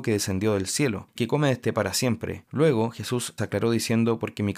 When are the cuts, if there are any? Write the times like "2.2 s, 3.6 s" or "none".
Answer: 1.2 s, 1.7 s, 3.4 s